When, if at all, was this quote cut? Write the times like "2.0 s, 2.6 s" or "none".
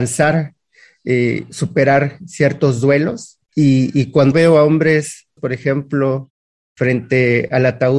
3.5 s, 4.3 s, 5.4 s